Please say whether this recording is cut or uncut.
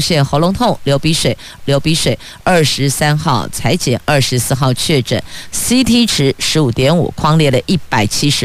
cut